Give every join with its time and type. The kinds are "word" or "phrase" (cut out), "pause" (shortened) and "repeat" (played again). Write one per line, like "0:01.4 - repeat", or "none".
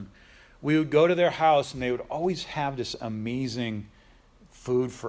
none